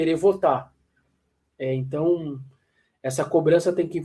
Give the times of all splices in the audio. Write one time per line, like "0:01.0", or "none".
none

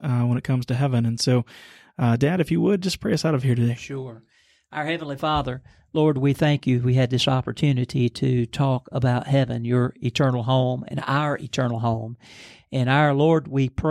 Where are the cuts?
none

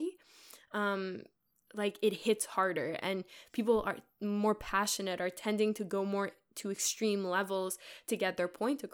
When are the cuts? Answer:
none

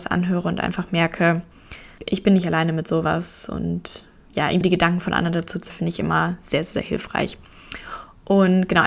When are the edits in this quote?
0:02.0
0:04.6
0:05.7

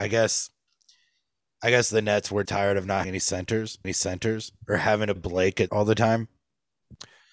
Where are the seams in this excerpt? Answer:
0:02.4
0:03.0
0:03.8
0:05.2
0:05.7

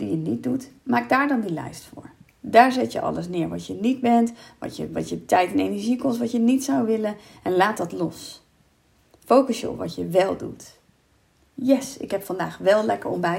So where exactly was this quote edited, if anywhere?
none

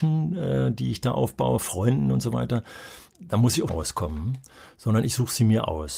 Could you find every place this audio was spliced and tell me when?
0:03.1
0:03.7

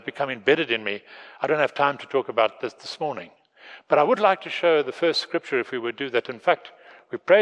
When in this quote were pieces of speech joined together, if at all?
none

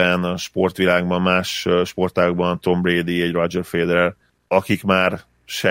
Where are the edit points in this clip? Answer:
none

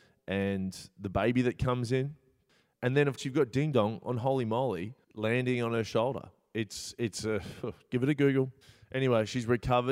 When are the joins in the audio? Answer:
0:03.2
0:05.0
0:08.6

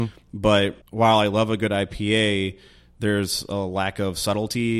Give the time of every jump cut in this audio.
none

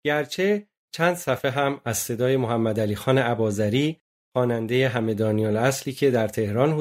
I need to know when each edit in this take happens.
none

